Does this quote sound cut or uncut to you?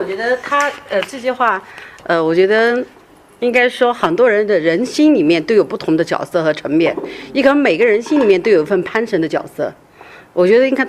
uncut